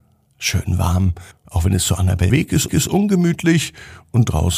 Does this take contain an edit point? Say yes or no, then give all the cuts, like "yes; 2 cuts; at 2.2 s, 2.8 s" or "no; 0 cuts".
yes; 3 cuts; at 1.3 s, 2.3 s, 2.7 s